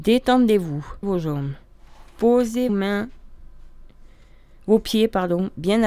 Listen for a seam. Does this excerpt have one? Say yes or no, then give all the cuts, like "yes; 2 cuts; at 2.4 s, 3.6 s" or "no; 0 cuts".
yes; 2 cuts; at 1.0 s, 2.7 s